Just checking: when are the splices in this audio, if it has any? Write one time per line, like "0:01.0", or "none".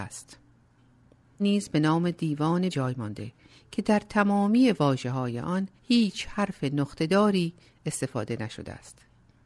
0:01.4
0:02.7
0:05.8